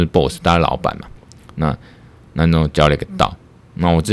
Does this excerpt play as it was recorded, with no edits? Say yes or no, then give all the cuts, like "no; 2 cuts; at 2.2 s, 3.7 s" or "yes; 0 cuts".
yes; 0 cuts